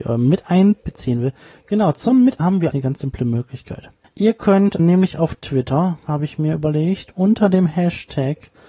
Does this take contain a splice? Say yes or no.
yes